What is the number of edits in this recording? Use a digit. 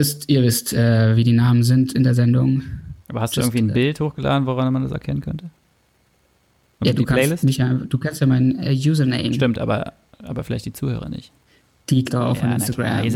1